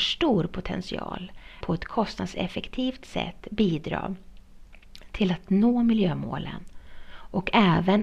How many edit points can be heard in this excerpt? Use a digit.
1